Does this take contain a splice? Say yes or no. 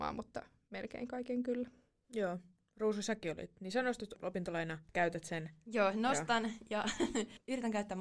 no